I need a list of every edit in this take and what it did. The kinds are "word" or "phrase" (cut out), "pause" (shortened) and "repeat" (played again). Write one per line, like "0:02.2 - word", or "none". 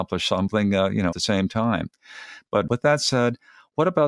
0:01.1 - word